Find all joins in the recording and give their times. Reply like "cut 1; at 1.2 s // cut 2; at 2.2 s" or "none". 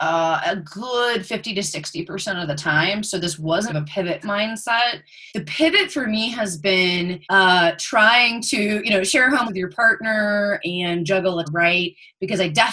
cut 1; at 3.7 s // cut 2; at 4.2 s // cut 3; at 5.3 s // cut 4; at 7.2 s // cut 5; at 9.5 s // cut 6; at 11.4 s